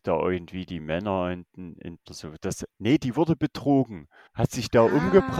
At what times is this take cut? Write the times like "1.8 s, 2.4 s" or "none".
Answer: 2.1 s, 4.3 s

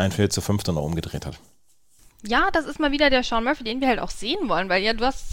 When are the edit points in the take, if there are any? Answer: none

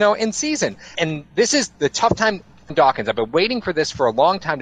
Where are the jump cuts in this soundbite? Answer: 0.9 s, 1.7 s, 2.7 s

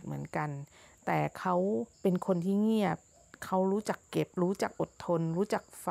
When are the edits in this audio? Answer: 1.9 s, 4.3 s

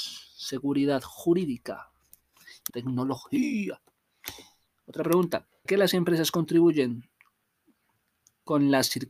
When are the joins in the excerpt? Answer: 2.7 s, 5.7 s

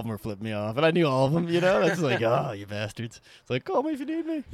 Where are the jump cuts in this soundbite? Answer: none

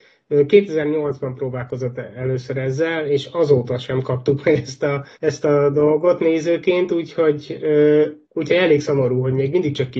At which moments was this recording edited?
5.1 s, 8.2 s

